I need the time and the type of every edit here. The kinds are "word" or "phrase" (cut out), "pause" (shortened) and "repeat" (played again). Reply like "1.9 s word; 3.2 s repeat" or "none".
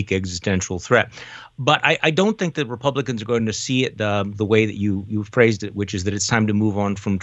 none